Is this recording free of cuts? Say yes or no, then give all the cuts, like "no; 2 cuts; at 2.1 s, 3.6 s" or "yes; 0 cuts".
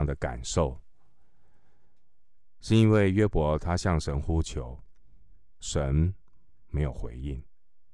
no; 1 cut; at 5.6 s